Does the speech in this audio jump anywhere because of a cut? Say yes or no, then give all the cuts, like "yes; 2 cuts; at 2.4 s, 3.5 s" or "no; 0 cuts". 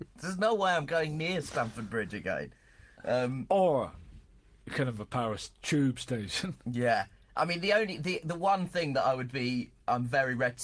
no; 0 cuts